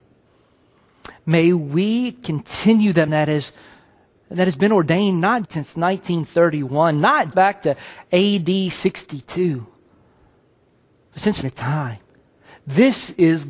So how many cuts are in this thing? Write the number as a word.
four